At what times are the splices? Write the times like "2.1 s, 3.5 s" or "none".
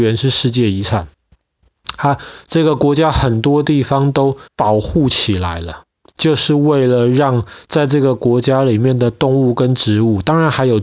4.5 s, 6.1 s

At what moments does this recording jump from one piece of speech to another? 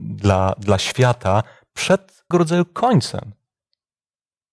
2.3 s

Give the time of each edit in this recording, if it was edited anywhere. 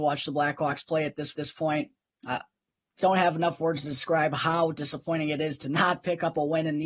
1.3 s

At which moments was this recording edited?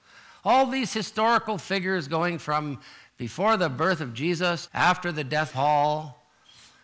4.7 s, 5.5 s

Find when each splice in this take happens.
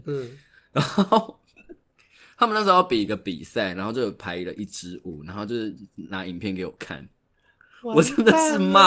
none

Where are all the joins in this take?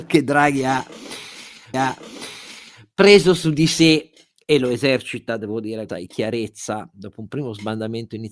1.7 s, 5.9 s

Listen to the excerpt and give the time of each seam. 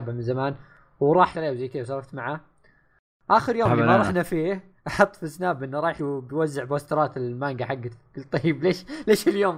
1.3 s, 4.8 s, 6.0 s

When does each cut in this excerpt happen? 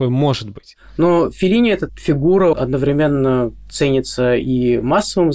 1.9 s, 2.5 s

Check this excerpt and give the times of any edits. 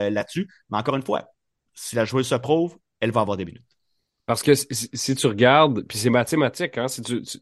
none

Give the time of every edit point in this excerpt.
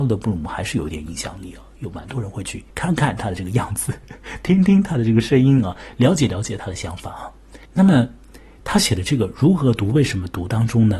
2.7 s, 7.6 s

